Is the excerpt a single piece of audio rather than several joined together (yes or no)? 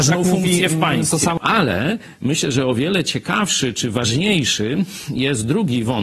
yes